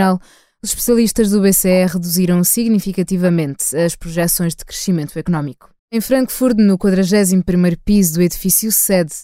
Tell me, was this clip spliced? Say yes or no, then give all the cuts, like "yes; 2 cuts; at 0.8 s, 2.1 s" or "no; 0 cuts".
yes; 1 cut; at 5.8 s